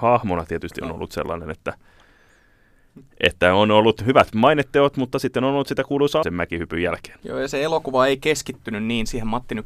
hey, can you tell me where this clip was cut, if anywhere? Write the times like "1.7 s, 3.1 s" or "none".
6.2 s